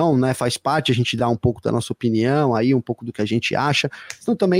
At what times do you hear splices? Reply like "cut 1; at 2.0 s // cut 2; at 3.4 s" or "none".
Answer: none